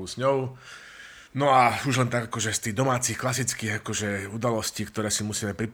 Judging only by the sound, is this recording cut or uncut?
cut